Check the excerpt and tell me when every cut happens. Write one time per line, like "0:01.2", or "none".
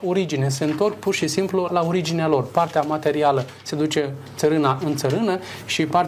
0:01.7

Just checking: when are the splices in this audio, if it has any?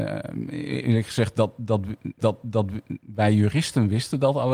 0:02.2

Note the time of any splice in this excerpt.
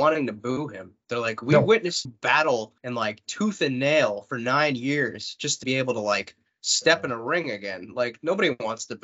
0:02.0
0:02.8
0:05.6

